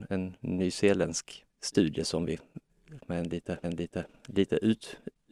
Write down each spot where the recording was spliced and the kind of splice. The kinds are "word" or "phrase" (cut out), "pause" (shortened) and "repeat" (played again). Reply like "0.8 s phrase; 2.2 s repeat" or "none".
1.5 s pause; 3.0 s phrase; 3.6 s repeat